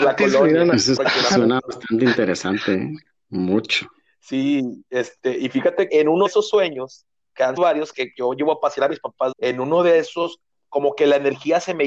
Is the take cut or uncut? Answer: cut